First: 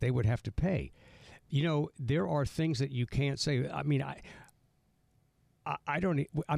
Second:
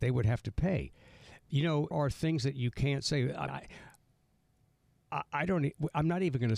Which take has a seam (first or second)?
second